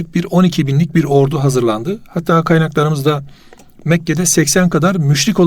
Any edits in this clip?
no; 0 cuts

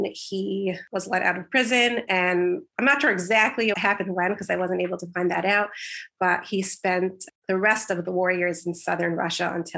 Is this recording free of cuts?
no; 2 cuts; at 3.7 s, 7.4 s

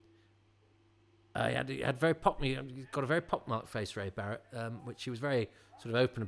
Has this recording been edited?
no; 0 cuts

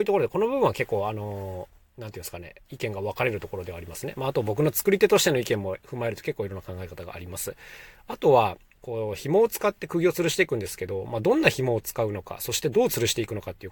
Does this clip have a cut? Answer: no; 0 cuts

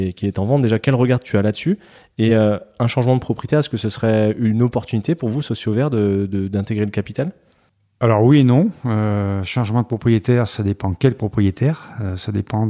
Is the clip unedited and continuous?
yes; 0 cuts

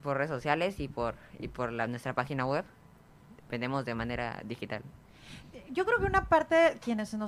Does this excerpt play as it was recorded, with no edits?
yes; 0 cuts

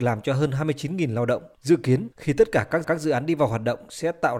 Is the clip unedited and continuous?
no; 3 cuts; at 1.5 s, 2.1 s, 2.8 s

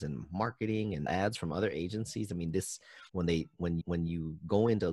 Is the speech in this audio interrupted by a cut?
yes; 3 cuts; at 1.1 s, 3.1 s, 3.8 s

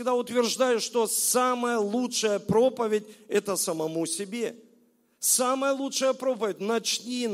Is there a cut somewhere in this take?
no; 0 cuts

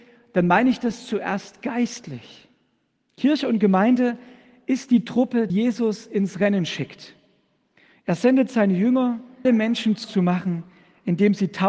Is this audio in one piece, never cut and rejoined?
no; 3 cuts; at 5.5 s, 9.4 s, 10.0 s

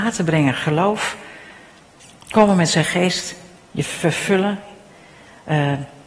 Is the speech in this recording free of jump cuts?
yes; 0 cuts

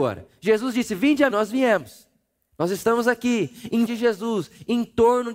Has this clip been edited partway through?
yes; 2 cuts; at 1.3 s, 3.8 s

